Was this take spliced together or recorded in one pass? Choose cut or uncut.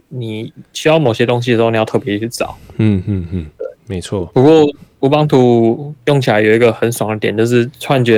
cut